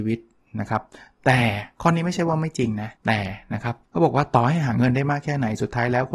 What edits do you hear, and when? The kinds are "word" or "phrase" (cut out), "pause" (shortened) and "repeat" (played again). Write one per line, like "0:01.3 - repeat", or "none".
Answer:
0:03.0 - pause
0:03.8 - pause